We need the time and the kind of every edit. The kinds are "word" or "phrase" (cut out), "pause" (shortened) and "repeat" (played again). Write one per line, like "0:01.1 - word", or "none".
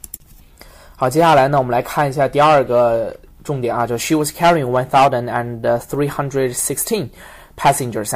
none